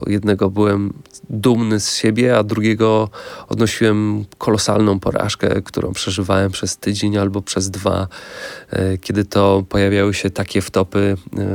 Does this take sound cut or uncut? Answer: uncut